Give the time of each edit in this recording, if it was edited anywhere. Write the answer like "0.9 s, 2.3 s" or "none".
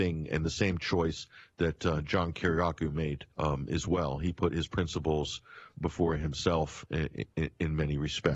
3.3 s